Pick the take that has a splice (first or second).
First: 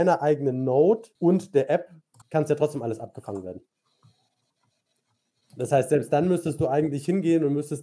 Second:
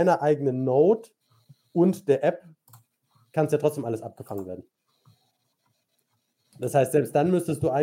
first